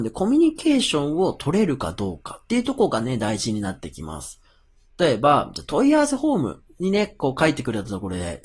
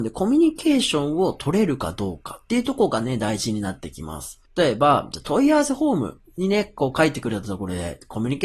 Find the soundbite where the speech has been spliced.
second; 1 cut; at 4.5 s

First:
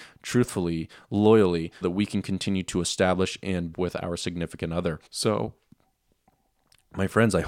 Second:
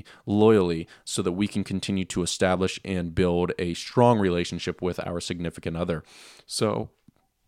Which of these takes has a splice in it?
first; 3 cuts; at 1.8 s, 3.7 s, 5.1 s

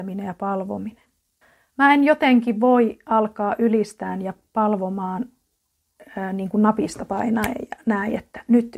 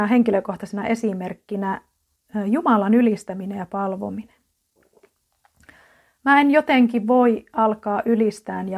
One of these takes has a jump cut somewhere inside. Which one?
first; 1 cut; at 1.4 s

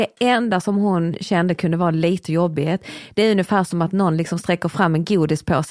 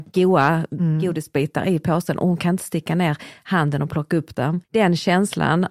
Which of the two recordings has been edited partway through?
second; 1 cut; at 4.6 s

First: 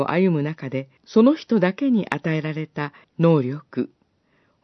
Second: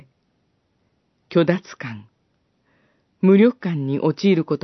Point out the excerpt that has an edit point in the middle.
first; 2 cuts; at 1.0 s, 3.0 s

